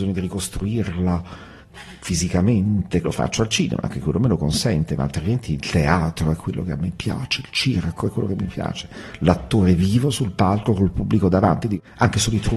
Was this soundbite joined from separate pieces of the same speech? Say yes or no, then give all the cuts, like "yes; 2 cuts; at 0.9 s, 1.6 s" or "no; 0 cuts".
yes; 1 cut; at 3.0 s